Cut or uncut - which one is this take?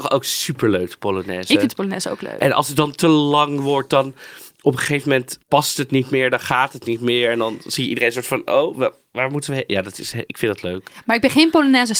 cut